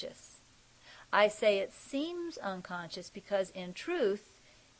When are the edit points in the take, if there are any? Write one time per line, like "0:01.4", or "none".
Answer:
none